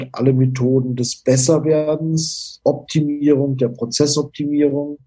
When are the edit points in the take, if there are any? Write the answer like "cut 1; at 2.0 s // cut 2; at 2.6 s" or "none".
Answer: cut 1; at 2.6 s